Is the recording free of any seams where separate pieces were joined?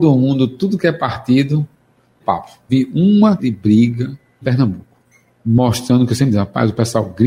no; 4 cuts; at 2.2 s, 2.7 s, 3.4 s, 4.4 s

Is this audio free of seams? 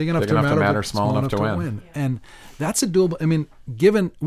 yes; 0 cuts

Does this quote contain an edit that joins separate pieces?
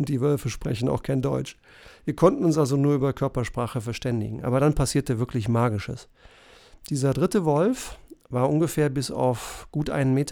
no; 0 cuts

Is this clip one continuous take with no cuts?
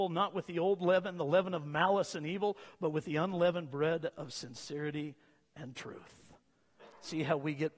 yes; 0 cuts

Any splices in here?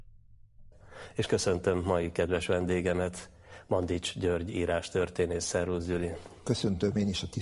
no; 0 cuts

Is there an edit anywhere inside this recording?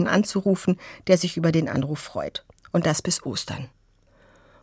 no; 0 cuts

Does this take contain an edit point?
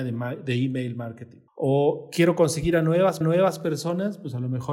yes; 2 cuts; at 1.5 s, 3.2 s

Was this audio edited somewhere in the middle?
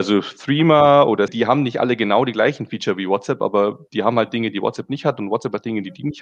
yes; 1 cut; at 1.3 s

